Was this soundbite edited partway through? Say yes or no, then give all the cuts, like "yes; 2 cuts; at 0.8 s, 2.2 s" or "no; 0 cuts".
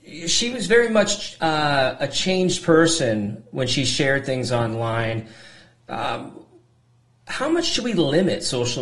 no; 0 cuts